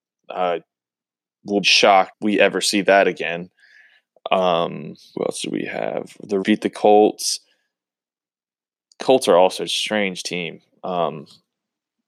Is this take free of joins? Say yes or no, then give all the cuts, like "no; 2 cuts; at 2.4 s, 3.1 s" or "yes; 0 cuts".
no; 5 cuts; at 1.6 s, 2.1 s, 5.1 s, 6.4 s, 9.7 s